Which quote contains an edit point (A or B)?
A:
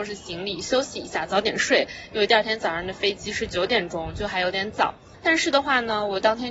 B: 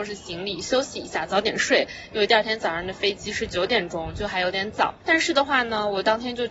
B